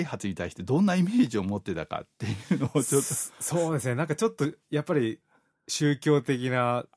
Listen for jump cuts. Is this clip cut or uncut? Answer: cut